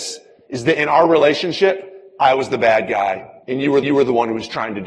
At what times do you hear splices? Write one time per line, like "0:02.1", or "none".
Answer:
0:03.4
0:03.8